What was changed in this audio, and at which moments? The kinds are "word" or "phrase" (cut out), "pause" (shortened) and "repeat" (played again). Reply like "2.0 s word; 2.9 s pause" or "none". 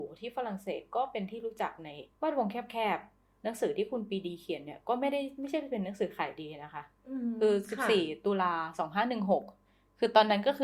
2.1 s pause